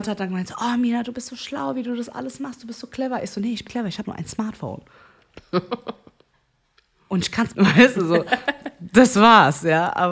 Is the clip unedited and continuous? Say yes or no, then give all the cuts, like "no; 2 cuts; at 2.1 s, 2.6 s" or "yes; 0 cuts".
no; 3 cuts; at 3.7 s, 4.0 s, 7.5 s